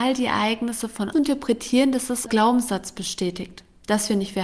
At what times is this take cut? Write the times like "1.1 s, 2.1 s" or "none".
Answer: 1.1 s, 2.3 s

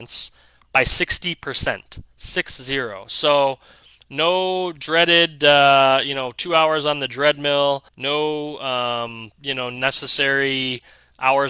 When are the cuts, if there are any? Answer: 2.1 s, 7.9 s

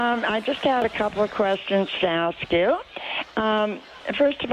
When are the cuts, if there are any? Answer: none

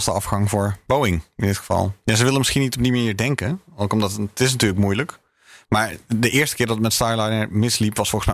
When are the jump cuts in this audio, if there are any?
none

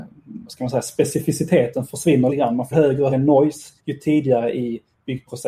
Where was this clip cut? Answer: 2.3 s, 2.7 s, 3.1 s, 3.8 s

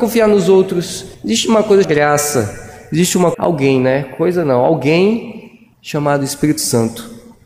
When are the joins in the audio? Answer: 1.1 s, 1.8 s, 3.3 s, 5.7 s

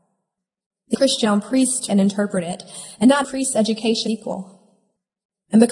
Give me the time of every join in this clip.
0.9 s, 1.2 s, 1.9 s, 3.2 s, 4.1 s

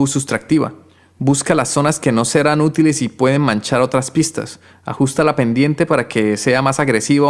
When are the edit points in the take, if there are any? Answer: none

